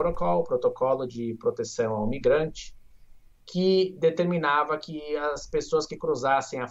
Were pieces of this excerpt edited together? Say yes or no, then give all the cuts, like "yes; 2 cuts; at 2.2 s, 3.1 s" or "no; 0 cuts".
no; 0 cuts